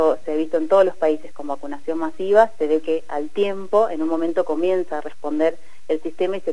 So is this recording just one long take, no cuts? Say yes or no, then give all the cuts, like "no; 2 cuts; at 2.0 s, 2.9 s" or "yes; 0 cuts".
yes; 0 cuts